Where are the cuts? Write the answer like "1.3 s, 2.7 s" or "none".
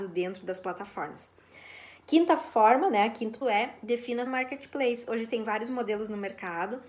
3.4 s, 4.3 s